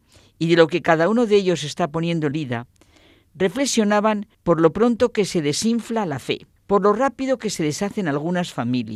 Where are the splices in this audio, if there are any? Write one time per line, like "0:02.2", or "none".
0:02.3
0:04.3
0:06.6